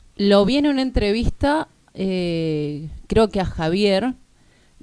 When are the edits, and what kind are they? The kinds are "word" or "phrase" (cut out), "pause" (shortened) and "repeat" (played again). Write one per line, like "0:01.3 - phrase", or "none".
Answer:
none